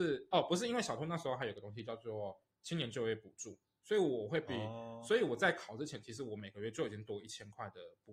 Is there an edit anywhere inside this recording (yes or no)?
no